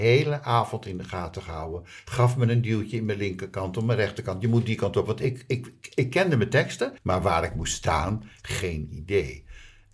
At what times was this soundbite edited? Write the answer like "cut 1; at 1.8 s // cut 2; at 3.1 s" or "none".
cut 1; at 7.0 s